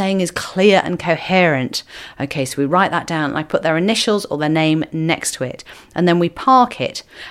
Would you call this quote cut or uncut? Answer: uncut